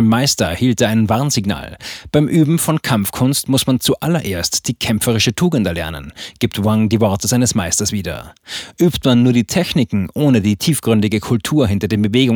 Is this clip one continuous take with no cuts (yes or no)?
yes